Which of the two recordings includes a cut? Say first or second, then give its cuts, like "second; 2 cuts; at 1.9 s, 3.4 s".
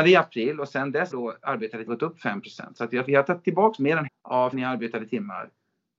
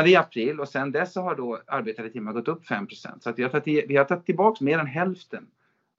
first; 5 cuts; at 1.1 s, 1.9 s, 3.1 s, 4.1 s, 4.5 s